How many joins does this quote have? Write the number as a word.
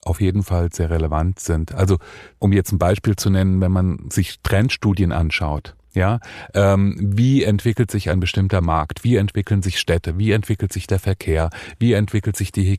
zero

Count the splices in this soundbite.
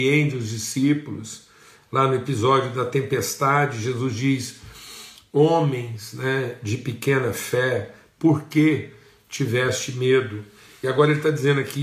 zero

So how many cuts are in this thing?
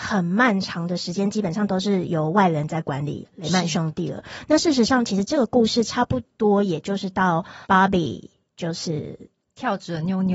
one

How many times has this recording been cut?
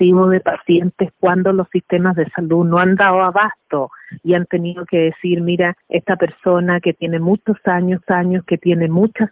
two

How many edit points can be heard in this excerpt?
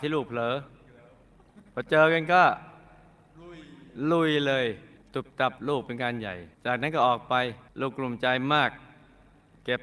three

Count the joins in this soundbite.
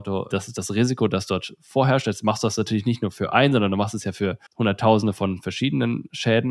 one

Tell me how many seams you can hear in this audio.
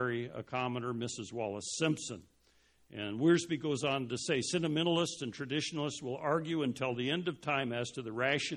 zero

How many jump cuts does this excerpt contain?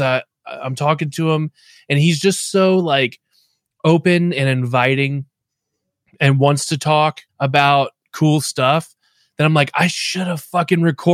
one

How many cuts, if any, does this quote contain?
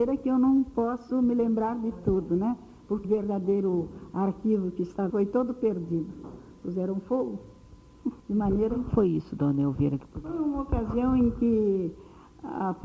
four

